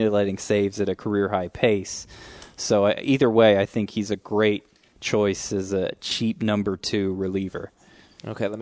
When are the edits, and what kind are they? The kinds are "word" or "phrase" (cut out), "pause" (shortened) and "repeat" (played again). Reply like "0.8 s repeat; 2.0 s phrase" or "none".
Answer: none